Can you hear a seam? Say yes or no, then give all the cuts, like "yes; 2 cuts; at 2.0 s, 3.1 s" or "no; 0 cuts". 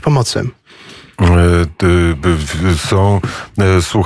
no; 0 cuts